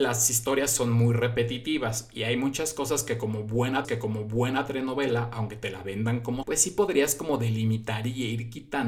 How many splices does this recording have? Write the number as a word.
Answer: two